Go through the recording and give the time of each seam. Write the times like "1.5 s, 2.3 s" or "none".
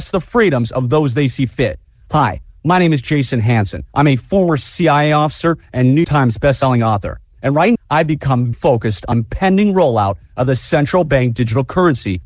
3.9 s, 6.0 s, 7.8 s, 8.5 s, 9.1 s